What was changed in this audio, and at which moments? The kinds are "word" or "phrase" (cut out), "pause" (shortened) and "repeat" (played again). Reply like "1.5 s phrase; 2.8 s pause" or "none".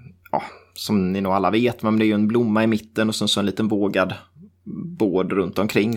none